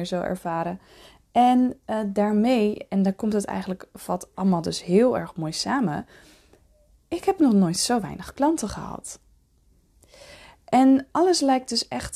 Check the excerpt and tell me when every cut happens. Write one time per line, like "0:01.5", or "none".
none